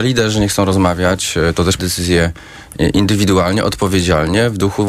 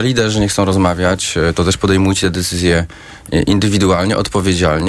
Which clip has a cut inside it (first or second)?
first